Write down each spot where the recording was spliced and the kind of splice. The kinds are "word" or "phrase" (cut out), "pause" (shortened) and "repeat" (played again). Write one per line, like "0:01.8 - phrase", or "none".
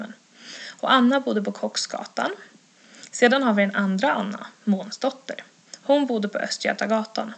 none